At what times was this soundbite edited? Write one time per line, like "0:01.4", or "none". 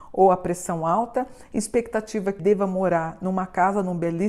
0:02.4